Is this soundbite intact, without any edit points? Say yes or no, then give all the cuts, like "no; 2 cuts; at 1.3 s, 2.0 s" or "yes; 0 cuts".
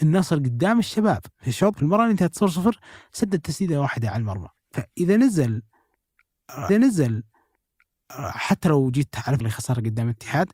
no; 5 cuts; at 1.3 s, 1.7 s, 4.6 s, 6.7 s, 9.4 s